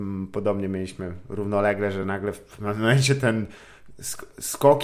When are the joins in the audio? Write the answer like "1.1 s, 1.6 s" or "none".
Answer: none